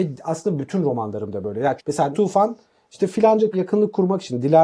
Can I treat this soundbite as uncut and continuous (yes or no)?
no